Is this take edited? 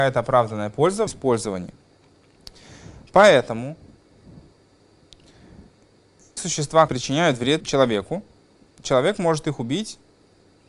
yes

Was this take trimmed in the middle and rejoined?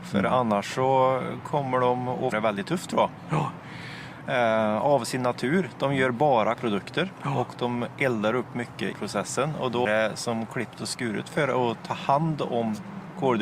yes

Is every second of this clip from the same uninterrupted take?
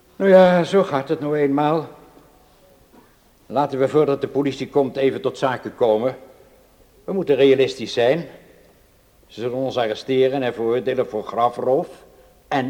yes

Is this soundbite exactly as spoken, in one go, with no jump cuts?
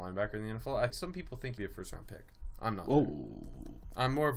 no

